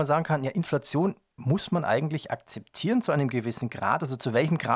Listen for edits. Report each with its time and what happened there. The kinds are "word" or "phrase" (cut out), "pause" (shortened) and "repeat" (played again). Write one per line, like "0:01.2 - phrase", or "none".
none